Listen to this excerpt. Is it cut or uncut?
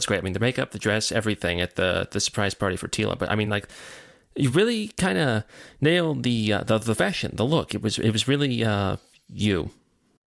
uncut